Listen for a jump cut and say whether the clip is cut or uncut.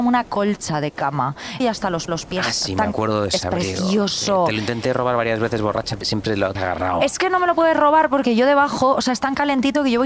cut